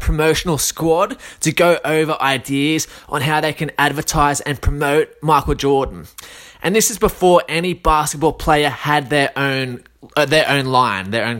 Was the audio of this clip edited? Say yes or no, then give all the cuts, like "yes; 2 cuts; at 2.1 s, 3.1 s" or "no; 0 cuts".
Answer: no; 0 cuts